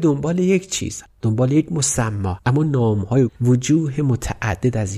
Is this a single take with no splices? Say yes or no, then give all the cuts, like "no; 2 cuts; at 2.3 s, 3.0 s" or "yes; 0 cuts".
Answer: no; 3 cuts; at 1.0 s, 2.4 s, 3.3 s